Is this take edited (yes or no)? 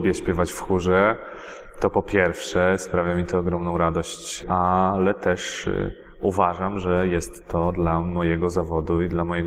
no